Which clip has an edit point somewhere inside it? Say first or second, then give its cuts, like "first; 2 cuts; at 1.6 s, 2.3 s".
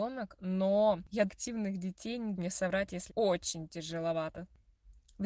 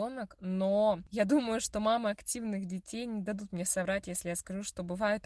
first; 3 cuts; at 1.3 s, 2.3 s, 3.1 s